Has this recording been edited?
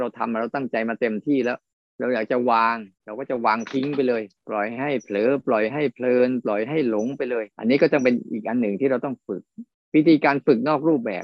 yes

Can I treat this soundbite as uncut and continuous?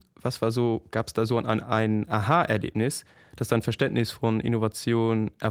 yes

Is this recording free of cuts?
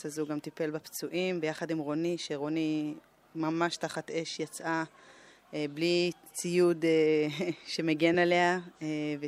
yes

